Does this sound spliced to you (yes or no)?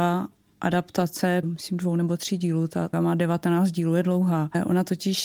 yes